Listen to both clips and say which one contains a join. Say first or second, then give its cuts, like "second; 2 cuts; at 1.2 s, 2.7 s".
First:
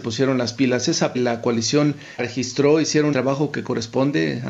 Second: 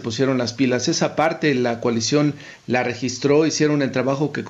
first; 3 cuts; at 1.1 s, 2.2 s, 3.1 s